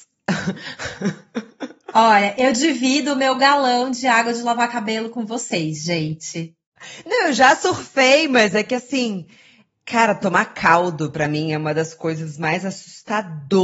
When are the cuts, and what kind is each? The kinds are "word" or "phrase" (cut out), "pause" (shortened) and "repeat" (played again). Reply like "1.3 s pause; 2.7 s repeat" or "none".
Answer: none